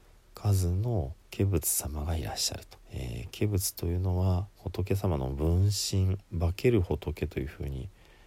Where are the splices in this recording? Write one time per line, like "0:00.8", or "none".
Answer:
0:01.2
0:02.8
0:04.5